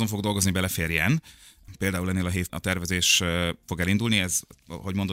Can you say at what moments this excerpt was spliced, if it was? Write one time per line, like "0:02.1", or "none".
0:02.5
0:03.7